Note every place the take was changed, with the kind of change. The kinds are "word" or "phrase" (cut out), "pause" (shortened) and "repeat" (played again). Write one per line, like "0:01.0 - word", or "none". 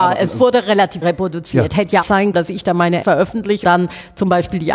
0:01.0 - word
0:02.0 - word
0:02.3 - word
0:03.0 - word
0:03.6 - word